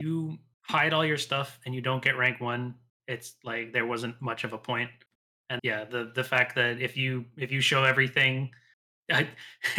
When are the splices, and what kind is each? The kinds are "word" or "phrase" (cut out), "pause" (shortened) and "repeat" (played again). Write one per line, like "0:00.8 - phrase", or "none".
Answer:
0:05.6 - word